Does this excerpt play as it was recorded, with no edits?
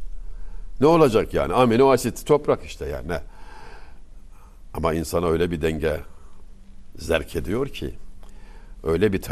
yes; 0 cuts

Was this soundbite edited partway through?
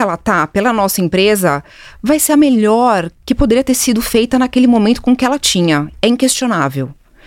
no; 0 cuts

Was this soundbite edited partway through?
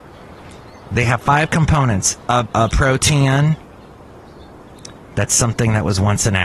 yes; 1 cut; at 2.4 s

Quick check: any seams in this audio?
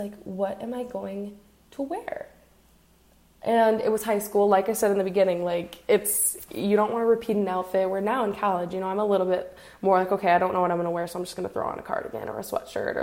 no; 0 cuts

